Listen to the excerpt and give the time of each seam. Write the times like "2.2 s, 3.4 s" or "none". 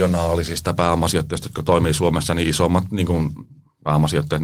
none